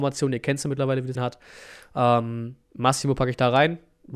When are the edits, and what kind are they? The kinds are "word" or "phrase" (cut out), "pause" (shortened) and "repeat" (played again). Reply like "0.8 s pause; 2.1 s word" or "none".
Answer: 1.1 s word; 2.6 s pause